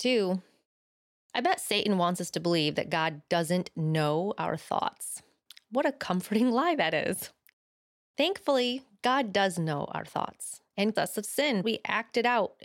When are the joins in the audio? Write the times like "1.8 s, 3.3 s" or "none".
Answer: 11.0 s, 11.6 s